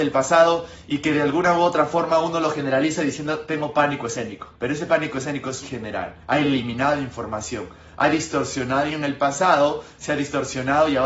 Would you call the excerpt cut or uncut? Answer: cut